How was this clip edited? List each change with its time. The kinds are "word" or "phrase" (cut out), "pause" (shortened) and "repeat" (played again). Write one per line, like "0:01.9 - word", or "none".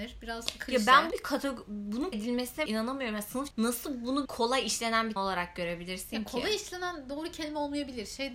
0:01.1 - word
0:02.1 - word
0:02.7 - word
0:03.5 - word
0:04.2 - word
0:05.2 - word